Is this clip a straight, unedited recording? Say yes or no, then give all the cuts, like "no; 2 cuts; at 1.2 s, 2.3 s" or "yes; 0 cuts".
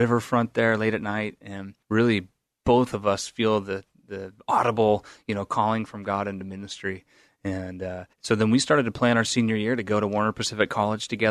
no; 2 cuts; at 1.8 s, 8.1 s